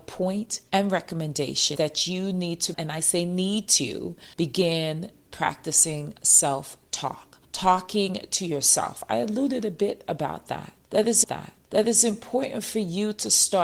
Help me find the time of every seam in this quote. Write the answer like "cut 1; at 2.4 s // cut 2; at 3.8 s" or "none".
cut 1; at 1.8 s // cut 2; at 2.7 s // cut 3; at 4.3 s // cut 4; at 7.4 s // cut 5; at 11.2 s